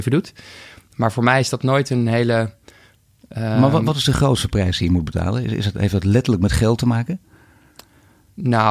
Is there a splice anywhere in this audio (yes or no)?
no